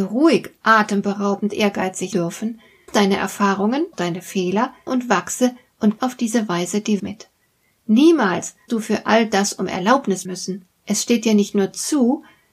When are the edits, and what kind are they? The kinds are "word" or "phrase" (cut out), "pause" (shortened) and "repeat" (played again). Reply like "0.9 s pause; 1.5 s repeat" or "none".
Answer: 2.1 s word; 2.9 s word; 3.9 s word; 4.9 s word; 6.0 s word; 7.0 s word; 8.7 s word; 10.2 s word